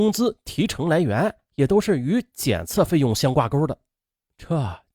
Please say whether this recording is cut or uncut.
uncut